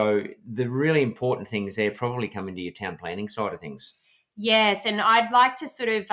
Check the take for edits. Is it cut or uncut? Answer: uncut